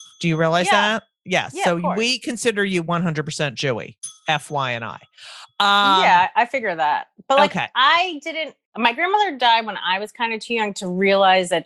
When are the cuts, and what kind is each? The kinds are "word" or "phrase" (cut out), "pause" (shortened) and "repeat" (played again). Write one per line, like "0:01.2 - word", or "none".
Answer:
0:08.6 - pause